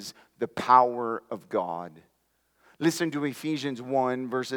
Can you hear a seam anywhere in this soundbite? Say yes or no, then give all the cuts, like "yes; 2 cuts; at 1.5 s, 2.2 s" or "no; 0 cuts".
no; 0 cuts